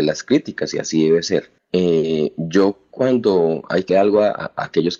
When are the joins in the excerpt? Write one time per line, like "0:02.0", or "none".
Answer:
0:03.9